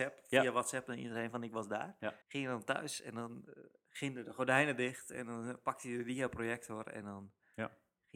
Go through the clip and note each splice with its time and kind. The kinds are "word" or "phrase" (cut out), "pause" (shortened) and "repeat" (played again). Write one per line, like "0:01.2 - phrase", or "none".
0:02.2 - pause